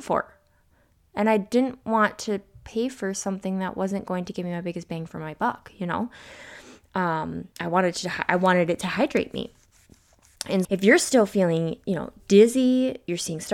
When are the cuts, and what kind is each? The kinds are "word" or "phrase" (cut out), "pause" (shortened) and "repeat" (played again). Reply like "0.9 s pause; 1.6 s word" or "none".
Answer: 7.5 s pause; 10.6 s word